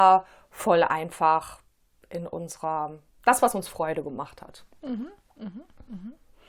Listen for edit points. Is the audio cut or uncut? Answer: uncut